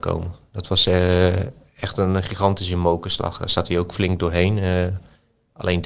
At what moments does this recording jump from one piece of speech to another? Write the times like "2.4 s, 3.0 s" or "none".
none